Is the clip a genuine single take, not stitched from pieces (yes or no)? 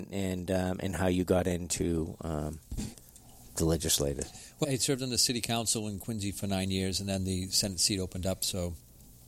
no